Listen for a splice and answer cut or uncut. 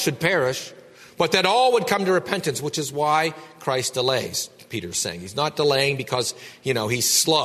uncut